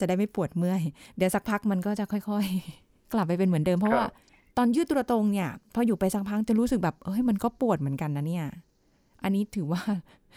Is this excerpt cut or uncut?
cut